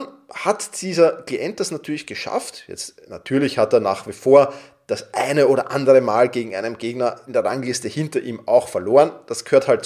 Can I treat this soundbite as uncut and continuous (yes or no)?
yes